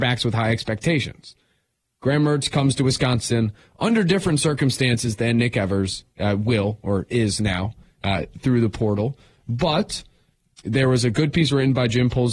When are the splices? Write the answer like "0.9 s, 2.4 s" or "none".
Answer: none